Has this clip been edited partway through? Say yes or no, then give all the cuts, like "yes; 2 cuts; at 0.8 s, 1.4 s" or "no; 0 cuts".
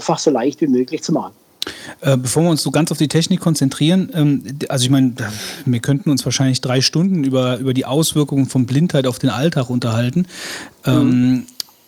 no; 0 cuts